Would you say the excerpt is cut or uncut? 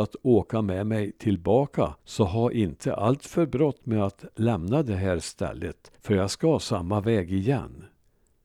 cut